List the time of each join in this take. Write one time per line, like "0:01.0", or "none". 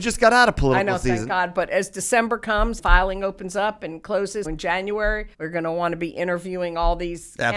0:02.8
0:04.4
0:05.3